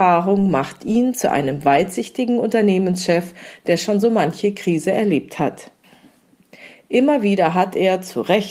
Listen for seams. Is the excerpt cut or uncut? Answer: uncut